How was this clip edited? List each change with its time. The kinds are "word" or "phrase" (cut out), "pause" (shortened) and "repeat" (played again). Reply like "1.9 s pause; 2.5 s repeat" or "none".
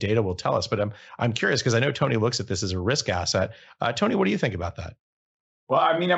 none